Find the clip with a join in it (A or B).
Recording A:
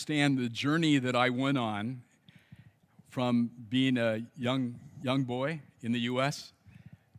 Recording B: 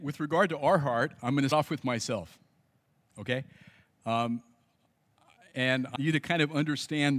B